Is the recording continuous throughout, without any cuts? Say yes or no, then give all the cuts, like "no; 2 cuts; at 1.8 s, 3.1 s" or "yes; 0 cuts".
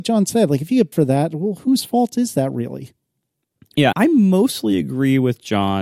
no; 2 cuts; at 0.9 s, 3.9 s